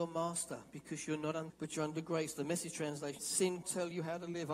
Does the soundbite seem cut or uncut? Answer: cut